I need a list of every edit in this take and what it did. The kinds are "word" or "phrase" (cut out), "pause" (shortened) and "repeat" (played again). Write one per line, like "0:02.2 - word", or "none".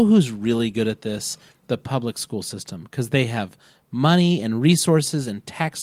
none